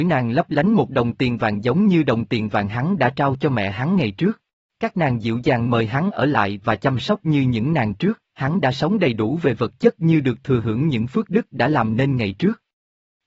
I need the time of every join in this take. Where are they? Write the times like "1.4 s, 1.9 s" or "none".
4.6 s, 8.3 s